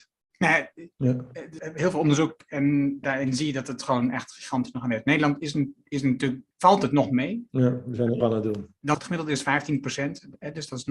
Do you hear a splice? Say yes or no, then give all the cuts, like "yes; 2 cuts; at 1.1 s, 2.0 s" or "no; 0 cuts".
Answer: yes; 7 cuts; at 0.9 s, 1.6 s, 3.0 s, 6.5 s, 7.5 s, 8.2 s, 8.9 s